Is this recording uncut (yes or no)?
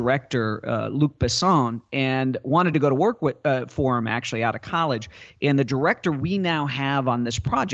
yes